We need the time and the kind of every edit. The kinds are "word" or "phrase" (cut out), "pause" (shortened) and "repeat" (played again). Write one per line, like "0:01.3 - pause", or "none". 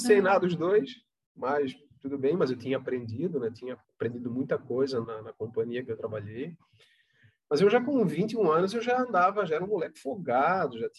0:03.8 - pause
0:05.0 - word